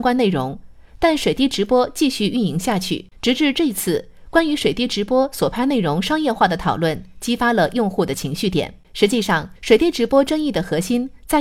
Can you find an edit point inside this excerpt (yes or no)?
yes